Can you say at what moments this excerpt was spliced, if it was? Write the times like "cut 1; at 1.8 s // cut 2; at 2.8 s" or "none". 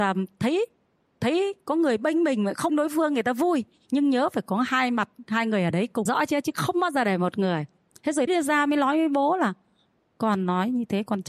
cut 1; at 2.7 s // cut 2; at 6.1 s // cut 3; at 8.3 s